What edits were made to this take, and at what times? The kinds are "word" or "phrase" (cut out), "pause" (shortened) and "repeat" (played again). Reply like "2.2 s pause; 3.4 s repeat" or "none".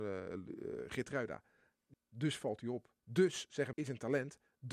1.9 s word; 3.0 s pause; 3.7 s word